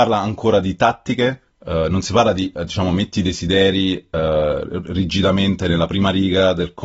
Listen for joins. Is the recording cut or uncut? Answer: uncut